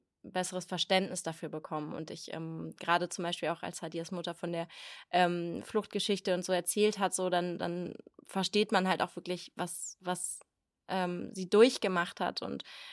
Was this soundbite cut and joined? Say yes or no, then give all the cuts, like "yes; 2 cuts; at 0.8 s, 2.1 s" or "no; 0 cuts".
no; 0 cuts